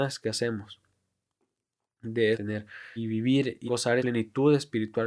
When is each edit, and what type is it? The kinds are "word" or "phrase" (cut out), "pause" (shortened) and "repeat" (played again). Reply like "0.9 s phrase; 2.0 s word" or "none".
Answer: 2.3 s phrase; 3.0 s word; 3.7 s word; 4.0 s word